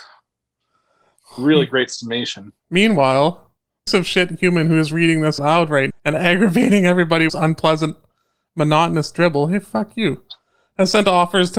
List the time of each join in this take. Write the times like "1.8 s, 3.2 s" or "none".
2.6 s, 3.9 s, 5.4 s, 5.9 s, 7.3 s